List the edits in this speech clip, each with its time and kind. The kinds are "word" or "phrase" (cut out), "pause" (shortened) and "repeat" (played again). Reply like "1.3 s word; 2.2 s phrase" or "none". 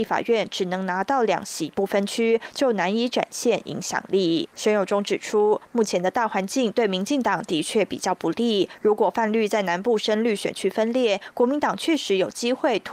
4.5 s pause